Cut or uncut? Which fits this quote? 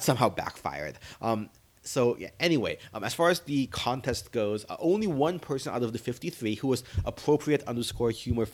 uncut